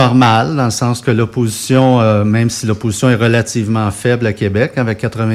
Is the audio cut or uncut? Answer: uncut